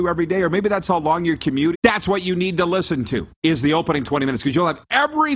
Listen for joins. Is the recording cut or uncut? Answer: cut